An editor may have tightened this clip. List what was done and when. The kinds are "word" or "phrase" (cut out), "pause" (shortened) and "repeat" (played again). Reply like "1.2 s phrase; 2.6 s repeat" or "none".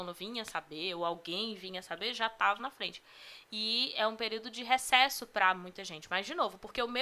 2.6 s word